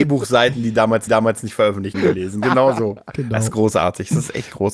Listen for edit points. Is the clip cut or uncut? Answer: cut